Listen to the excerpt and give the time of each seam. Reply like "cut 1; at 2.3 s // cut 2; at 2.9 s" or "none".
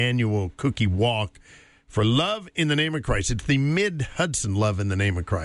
none